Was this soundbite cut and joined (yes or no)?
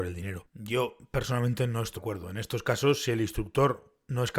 yes